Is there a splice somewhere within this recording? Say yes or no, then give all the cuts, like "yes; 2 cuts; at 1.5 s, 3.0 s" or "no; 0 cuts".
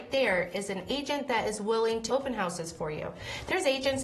yes; 1 cut; at 2.1 s